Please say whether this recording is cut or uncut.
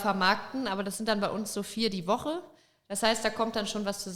uncut